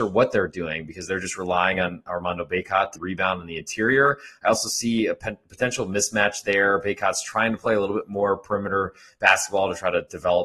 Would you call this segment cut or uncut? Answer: cut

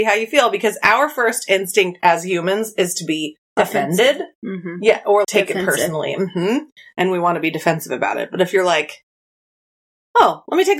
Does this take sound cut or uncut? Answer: cut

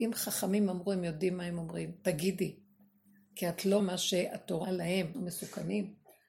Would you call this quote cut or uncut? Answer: cut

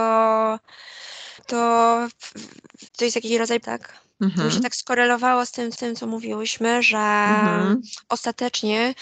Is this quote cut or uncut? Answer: cut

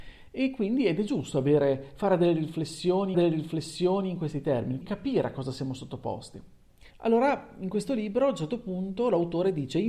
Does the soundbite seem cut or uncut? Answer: cut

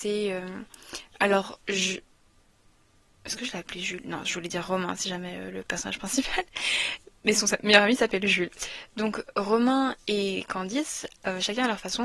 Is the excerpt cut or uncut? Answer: cut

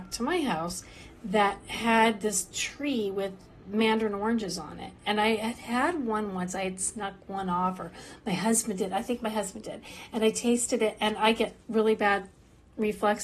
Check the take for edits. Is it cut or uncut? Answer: uncut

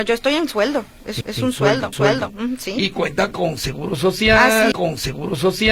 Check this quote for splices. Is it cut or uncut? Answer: cut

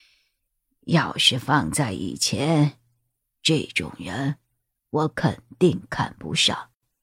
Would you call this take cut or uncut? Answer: uncut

